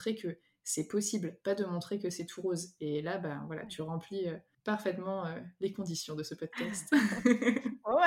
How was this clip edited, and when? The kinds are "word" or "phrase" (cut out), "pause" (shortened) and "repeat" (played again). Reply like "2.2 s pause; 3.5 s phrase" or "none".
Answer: 4.5 s pause